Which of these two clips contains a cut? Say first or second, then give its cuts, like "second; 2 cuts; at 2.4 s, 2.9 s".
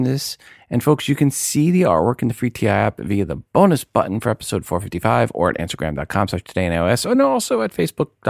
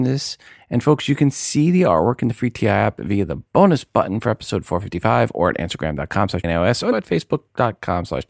second; 2 cuts; at 6.4 s, 6.9 s